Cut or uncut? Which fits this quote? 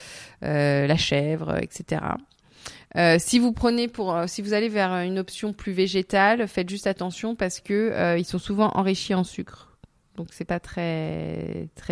uncut